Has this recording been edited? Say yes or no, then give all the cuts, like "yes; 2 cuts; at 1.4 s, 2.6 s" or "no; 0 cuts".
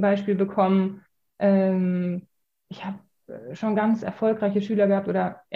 no; 0 cuts